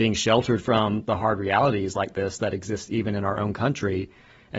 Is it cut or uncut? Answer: uncut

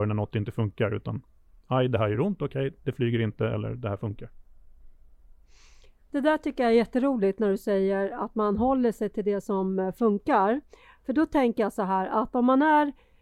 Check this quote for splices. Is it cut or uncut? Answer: uncut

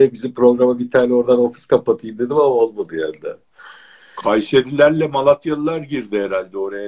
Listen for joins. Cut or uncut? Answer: uncut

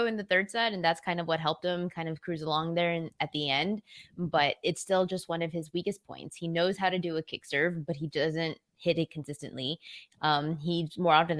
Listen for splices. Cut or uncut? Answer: uncut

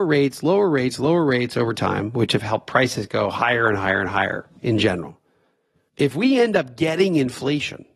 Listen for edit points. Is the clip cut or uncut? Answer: uncut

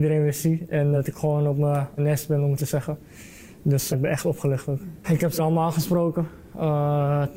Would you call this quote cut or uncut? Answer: cut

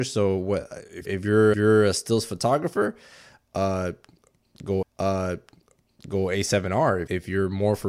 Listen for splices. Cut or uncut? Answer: cut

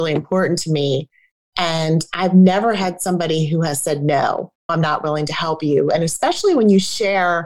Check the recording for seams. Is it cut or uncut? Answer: uncut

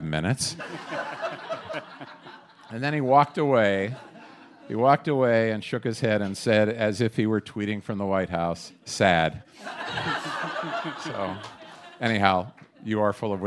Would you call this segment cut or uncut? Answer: uncut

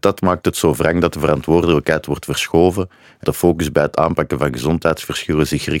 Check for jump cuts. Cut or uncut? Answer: cut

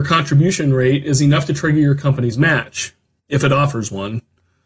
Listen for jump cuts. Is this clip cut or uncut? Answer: uncut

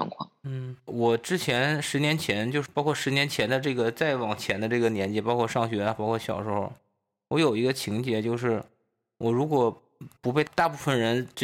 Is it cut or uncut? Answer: uncut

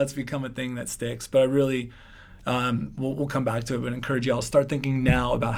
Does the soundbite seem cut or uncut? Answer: uncut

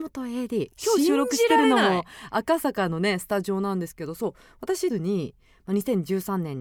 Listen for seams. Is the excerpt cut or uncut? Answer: cut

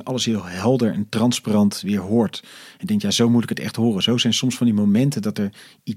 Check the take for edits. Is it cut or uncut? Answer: uncut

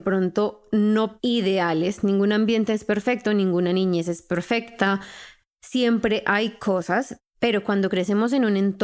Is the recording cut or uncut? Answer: uncut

